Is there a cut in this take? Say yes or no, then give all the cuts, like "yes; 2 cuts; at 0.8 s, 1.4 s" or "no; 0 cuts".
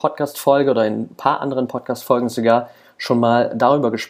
no; 0 cuts